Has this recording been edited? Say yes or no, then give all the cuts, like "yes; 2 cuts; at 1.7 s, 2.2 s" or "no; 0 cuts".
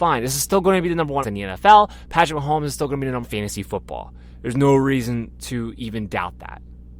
yes; 2 cuts; at 1.2 s, 3.2 s